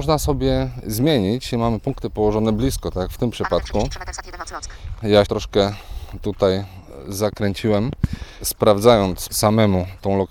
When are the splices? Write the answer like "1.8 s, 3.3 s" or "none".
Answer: 1.5 s, 5.3 s, 9.3 s